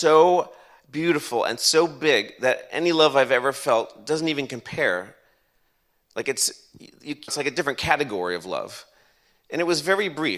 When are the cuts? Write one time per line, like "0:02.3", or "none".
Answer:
0:07.3